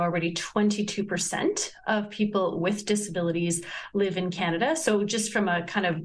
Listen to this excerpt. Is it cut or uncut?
uncut